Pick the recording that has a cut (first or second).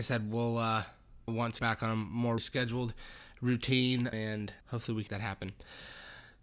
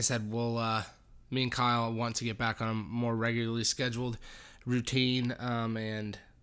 first